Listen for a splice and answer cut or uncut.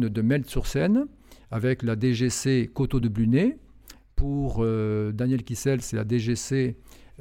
uncut